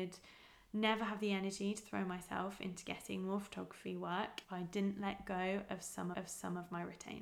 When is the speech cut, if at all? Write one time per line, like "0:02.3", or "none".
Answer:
0:04.4
0:06.1